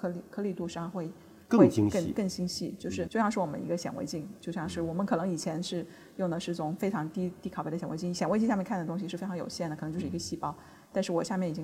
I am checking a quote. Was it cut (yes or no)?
yes